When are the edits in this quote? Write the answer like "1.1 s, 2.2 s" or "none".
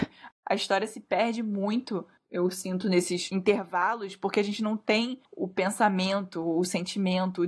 2.2 s